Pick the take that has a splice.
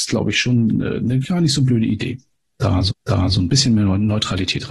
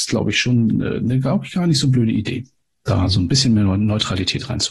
first; 2 cuts; at 1.2 s, 2.9 s

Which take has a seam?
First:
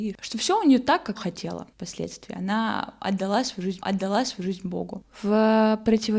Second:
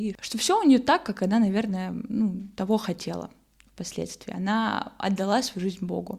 first; 3 cuts; at 1.2 s, 1.7 s, 3.8 s

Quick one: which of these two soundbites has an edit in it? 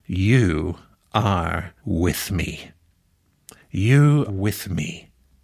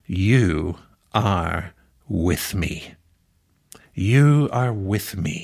first; 2 cuts; at 1.8 s, 4.3 s

